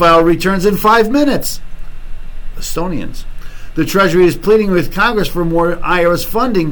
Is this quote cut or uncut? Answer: uncut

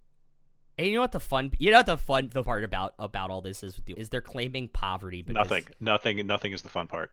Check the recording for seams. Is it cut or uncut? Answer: cut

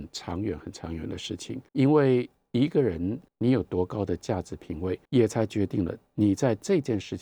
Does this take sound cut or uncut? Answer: cut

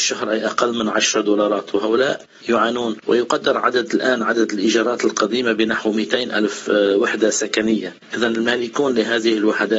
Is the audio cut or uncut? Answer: uncut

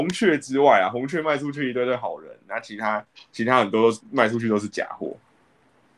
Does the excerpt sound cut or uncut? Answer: cut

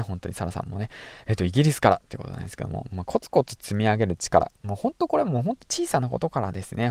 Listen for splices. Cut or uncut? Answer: uncut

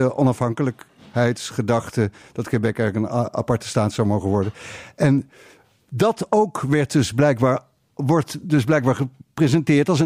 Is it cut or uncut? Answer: uncut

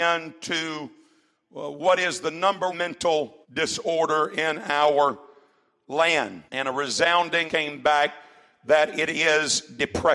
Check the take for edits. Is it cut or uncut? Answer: cut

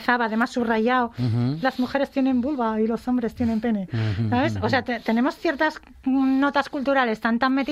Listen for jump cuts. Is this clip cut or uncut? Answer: uncut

